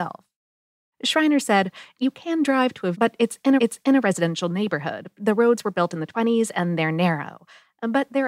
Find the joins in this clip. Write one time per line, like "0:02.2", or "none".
0:02.9
0:03.6